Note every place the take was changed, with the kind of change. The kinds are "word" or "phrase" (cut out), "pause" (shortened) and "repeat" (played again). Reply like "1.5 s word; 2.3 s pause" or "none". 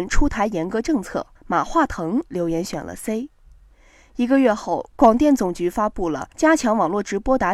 1.3 s pause; 6.3 s pause